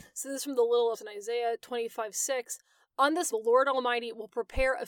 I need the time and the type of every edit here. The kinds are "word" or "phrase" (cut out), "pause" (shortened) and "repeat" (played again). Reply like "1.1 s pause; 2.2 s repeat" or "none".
0.9 s word; 3.3 s word